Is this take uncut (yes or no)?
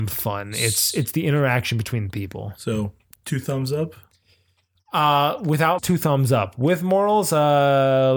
no